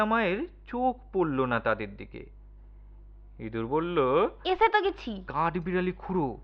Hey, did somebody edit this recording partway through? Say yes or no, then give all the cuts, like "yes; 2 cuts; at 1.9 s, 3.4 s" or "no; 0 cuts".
no; 0 cuts